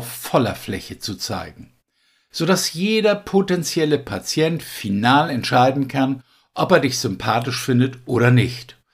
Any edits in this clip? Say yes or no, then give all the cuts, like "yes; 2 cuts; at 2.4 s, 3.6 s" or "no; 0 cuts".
no; 0 cuts